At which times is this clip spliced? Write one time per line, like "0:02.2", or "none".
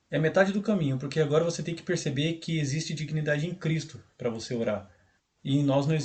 none